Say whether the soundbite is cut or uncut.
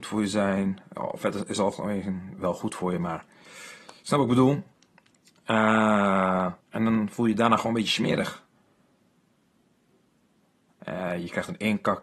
cut